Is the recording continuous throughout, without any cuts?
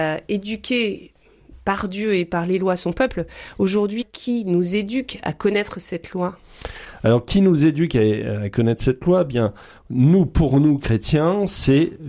yes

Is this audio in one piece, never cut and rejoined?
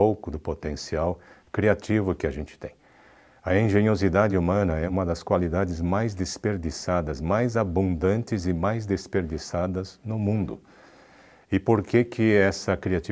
yes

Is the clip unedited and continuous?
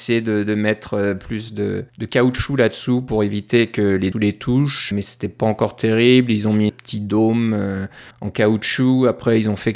no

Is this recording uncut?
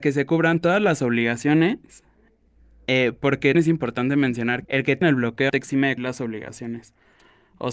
no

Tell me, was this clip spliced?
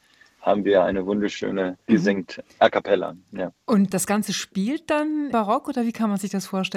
yes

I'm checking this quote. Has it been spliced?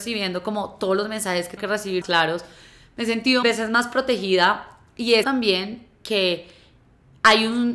yes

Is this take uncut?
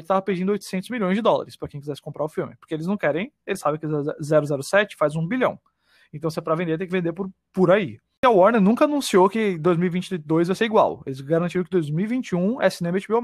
yes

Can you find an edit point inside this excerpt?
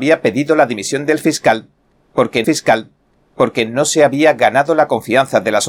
yes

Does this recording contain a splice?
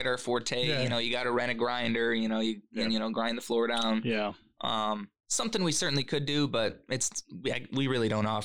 yes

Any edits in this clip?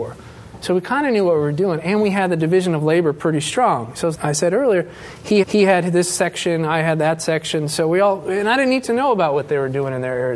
yes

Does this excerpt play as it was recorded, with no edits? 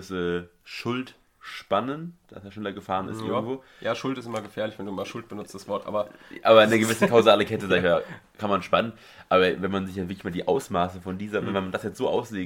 yes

